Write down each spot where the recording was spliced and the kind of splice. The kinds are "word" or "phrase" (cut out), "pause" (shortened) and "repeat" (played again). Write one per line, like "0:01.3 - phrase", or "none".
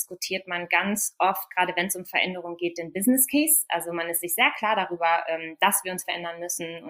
none